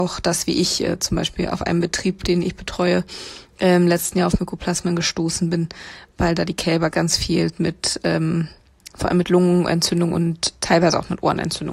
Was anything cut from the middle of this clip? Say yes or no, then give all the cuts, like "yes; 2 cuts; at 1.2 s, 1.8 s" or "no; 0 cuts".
yes; 1 cut; at 6.9 s